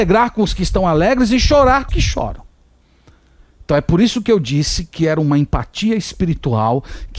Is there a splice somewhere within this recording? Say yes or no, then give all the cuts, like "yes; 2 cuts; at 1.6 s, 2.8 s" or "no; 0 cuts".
yes; 1 cut; at 1.9 s